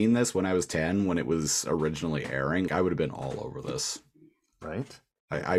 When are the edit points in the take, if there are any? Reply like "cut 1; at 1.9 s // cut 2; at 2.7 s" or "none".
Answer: cut 1; at 2.7 s